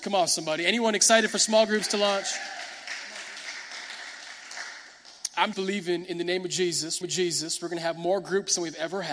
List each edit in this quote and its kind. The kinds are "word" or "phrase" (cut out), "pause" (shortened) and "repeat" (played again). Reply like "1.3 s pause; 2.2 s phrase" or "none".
5.5 s word; 7.0 s repeat